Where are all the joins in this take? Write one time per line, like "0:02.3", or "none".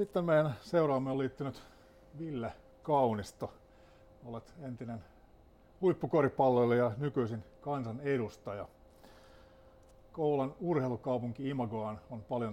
none